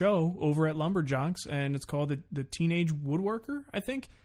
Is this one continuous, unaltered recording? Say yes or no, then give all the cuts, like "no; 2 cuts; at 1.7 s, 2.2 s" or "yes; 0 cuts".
yes; 0 cuts